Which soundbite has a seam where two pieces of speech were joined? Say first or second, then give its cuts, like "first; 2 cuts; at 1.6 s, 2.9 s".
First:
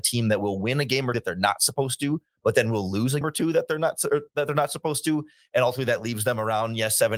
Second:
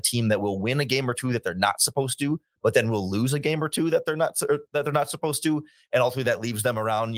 first; 2 cuts; at 1.1 s, 3.2 s